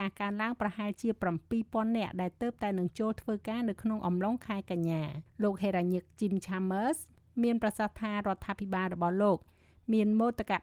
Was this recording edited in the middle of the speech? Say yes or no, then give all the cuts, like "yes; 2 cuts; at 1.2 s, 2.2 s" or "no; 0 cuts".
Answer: yes; 1 cut; at 5.3 s